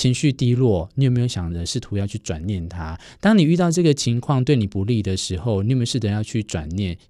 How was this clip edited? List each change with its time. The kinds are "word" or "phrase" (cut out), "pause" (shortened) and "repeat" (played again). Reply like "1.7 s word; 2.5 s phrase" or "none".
none

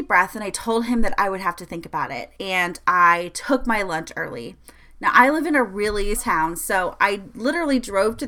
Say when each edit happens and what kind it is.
6.2 s word

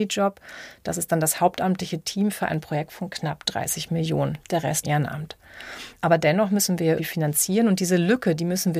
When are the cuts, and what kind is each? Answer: 4.8 s word; 7.0 s word

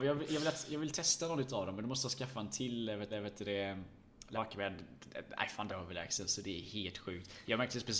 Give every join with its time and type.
3.1 s repeat; 4.3 s word; 5.7 s phrase

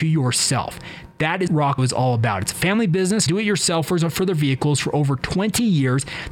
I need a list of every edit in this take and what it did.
1.5 s word; 1.8 s word; 3.3 s word

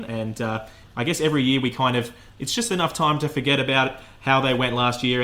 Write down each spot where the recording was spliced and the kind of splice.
none

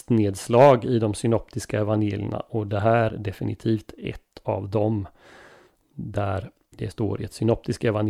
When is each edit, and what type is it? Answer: 3.1 s word; 6.9 s word

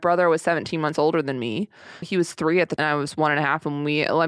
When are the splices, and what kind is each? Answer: 2.0 s word; 2.8 s word

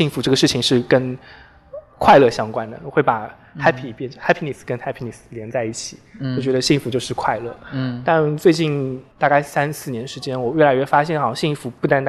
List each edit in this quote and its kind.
9.1 s pause

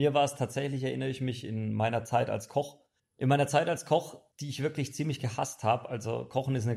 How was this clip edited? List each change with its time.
3.0 s pause; 4.3 s pause

